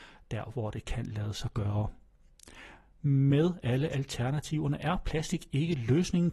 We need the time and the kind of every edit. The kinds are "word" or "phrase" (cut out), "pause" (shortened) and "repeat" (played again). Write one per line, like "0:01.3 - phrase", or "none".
none